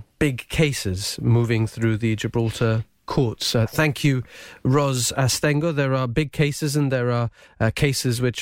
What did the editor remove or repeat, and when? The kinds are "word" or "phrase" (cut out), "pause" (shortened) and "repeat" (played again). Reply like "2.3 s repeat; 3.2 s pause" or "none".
none